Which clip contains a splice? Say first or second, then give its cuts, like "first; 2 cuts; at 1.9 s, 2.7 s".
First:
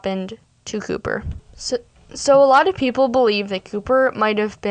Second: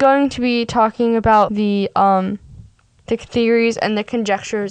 second; 2 cuts; at 1.5 s, 3.1 s